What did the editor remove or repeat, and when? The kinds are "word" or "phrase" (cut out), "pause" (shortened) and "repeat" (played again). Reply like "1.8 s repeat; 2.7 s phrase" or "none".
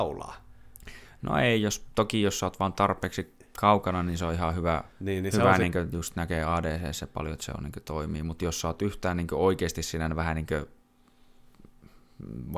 4.9 s pause